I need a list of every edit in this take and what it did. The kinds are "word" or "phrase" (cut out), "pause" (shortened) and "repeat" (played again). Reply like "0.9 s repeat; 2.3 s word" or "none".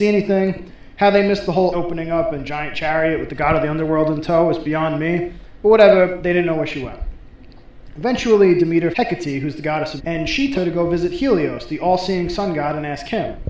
1.7 s word; 8.9 s word; 10.0 s word; 10.5 s word